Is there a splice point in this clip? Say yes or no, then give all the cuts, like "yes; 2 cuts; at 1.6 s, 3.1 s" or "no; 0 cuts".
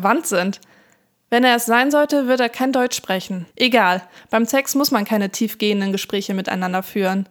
yes; 1 cut; at 3.5 s